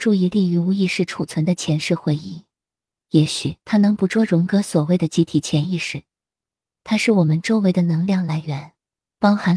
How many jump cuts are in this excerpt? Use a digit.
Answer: 1